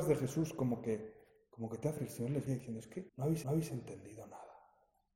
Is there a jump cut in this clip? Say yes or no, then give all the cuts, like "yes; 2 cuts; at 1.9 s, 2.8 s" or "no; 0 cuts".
yes; 4 cuts; at 2.0 s, 2.5 s, 3.1 s, 3.4 s